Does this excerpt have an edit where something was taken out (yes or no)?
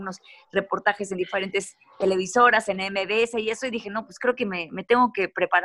no